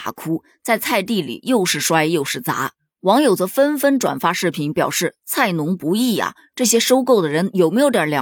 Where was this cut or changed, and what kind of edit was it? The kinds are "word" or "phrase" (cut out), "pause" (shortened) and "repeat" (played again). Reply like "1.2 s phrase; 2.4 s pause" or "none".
none